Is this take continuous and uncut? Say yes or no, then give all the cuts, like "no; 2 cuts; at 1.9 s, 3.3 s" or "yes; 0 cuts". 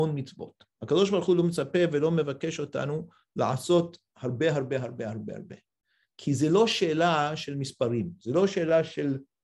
yes; 0 cuts